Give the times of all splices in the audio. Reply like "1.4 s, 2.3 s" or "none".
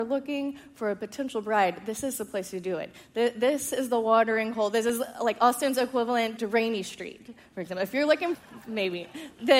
6.4 s, 8.3 s

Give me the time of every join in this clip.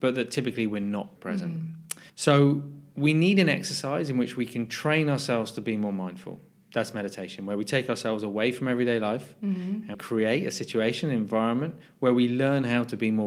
1.2 s, 2.1 s, 9.9 s

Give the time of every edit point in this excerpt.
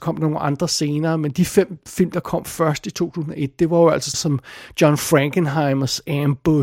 4.1 s

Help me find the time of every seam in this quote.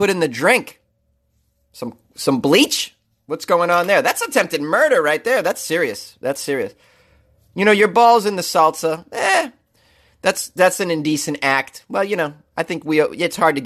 none

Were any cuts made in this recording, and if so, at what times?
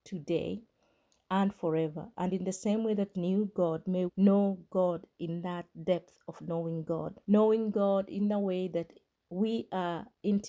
3.1 s, 4.1 s, 7.2 s

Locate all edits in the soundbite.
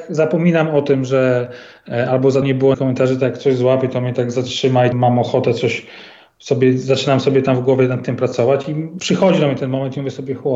2.4 s, 2.7 s, 4.9 s, 9.0 s

